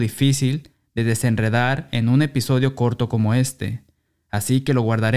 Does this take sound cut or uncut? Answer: uncut